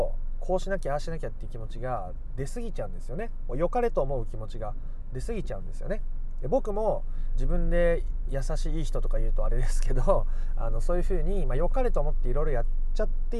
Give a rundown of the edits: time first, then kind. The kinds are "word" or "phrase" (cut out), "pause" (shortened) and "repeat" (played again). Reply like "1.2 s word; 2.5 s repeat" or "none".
7.3 s phrase